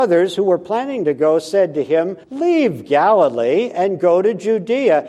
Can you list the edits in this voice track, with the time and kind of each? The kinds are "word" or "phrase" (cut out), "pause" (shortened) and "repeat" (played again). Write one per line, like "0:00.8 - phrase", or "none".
0:02.2 - pause